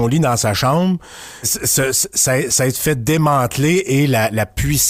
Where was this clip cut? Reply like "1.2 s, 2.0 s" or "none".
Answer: 1.4 s, 1.9 s